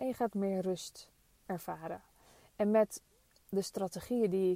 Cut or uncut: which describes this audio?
cut